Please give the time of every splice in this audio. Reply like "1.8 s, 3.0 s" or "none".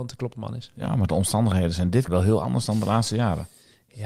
2.1 s